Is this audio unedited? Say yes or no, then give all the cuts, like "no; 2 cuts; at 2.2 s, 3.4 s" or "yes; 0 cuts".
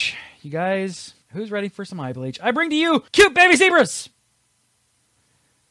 no; 2 cuts; at 1.2 s, 3.1 s